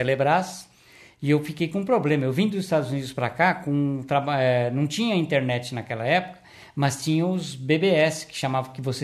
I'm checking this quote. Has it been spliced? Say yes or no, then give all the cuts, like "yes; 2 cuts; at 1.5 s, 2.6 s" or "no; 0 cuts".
no; 0 cuts